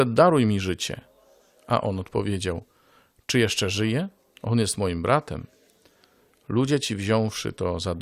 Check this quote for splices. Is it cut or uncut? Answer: uncut